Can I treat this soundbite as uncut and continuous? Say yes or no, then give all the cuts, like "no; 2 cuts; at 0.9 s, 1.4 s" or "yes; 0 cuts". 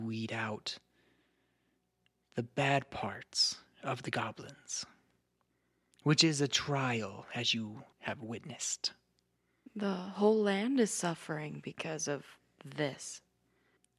no; 1 cut; at 7.9 s